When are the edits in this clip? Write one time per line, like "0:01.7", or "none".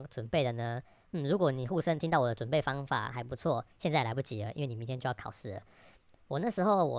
none